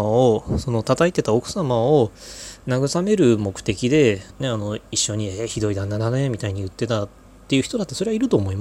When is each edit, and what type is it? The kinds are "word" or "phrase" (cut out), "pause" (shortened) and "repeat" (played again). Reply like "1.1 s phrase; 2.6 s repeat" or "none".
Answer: 4.3 s phrase